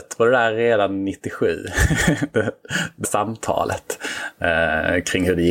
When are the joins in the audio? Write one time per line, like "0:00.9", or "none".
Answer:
0:03.0